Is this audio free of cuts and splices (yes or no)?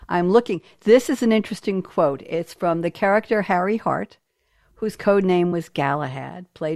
yes